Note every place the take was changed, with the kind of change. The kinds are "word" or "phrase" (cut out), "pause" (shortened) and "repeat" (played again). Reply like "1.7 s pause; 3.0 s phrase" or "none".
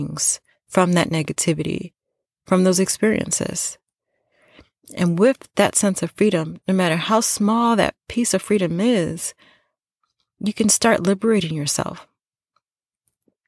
none